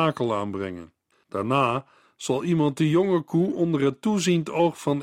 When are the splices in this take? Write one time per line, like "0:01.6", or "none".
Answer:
0:01.1